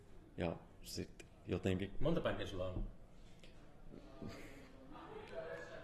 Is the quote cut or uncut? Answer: cut